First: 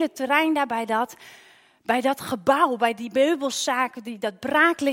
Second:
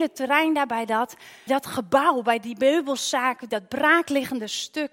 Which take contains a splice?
second; 2 cuts; at 1.5 s, 3.5 s

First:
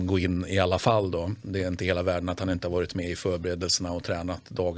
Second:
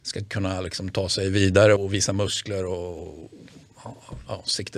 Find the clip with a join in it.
second; 1 cut; at 1.8 s

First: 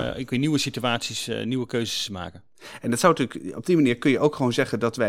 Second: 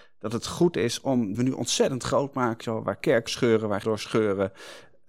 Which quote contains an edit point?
second; 4 cuts; at 1.3 s, 2.6 s, 3.3 s, 3.8 s

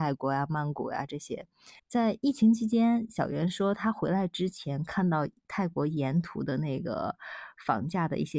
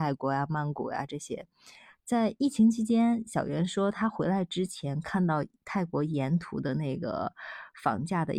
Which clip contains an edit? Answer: first; 1 cut; at 1.8 s

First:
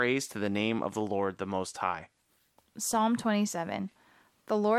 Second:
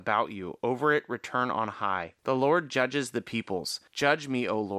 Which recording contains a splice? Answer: second; 2 cuts; at 2.2 s, 3.9 s

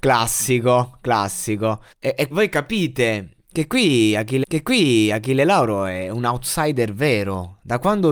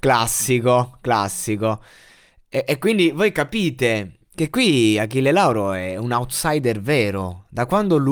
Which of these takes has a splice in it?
first; 3 cuts; at 1.9 s, 2.3 s, 4.4 s

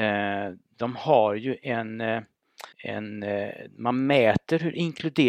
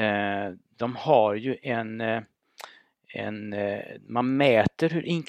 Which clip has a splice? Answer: first; 1 cut; at 2.7 s

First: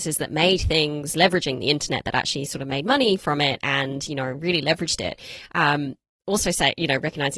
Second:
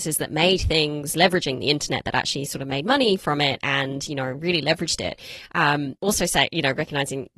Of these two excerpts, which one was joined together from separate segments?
second; 1 cut; at 6.0 s

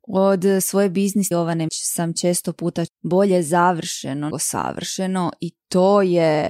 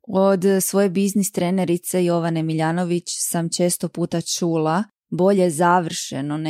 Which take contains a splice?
first; 4 cuts; at 1.3 s, 1.7 s, 2.9 s, 4.3 s

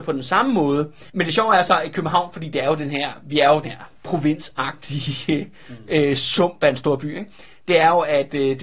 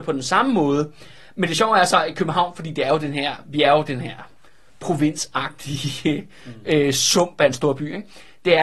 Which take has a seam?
first; 3 cuts; at 1.1 s, 3.6 s, 3.9 s

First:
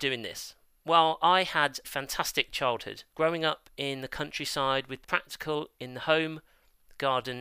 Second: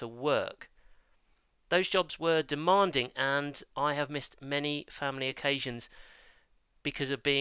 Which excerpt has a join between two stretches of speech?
first; 3 cuts; at 1.8 s, 3.1 s, 5.0 s

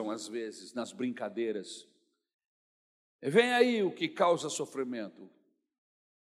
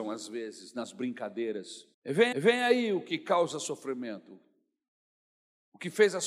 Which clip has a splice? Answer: second; 2 cuts; at 1.9 s, 2.3 s

